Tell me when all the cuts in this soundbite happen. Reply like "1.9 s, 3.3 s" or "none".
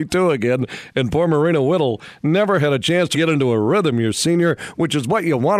3.1 s

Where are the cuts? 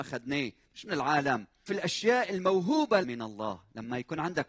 1.7 s, 3.0 s

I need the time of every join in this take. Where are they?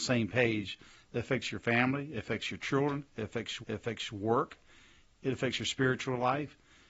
3.6 s

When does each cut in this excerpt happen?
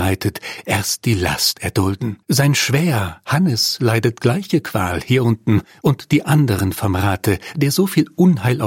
2.2 s

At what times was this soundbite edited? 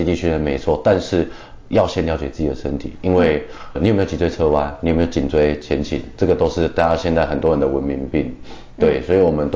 3.7 s

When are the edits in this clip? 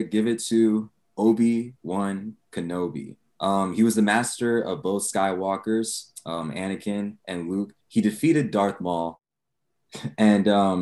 3.2 s, 7.2 s, 7.8 s

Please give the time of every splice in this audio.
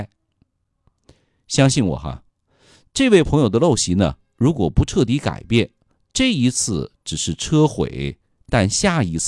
none

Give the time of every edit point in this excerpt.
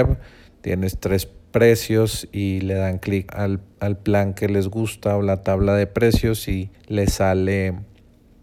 3.3 s, 6.7 s

